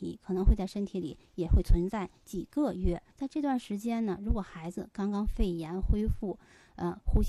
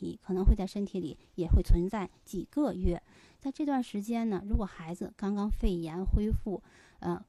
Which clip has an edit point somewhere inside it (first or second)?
first